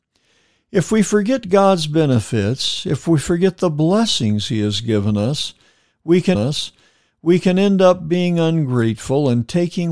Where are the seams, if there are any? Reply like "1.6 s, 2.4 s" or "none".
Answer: 6.3 s